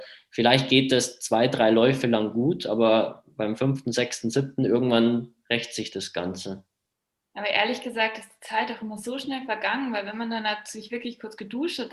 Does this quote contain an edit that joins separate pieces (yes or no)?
no